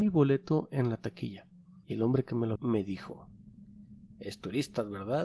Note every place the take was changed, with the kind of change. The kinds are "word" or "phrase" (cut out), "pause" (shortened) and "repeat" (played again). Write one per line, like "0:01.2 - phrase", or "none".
0:01.8 - pause
0:02.6 - word